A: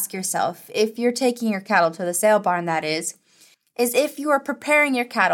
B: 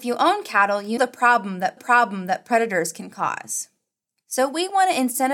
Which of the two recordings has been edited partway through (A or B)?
B